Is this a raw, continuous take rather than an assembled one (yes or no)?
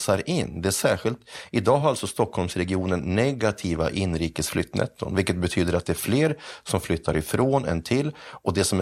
yes